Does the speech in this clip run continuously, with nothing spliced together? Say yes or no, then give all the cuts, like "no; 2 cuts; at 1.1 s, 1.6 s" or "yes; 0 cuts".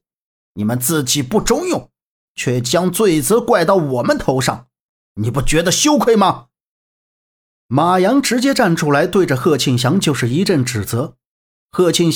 yes; 0 cuts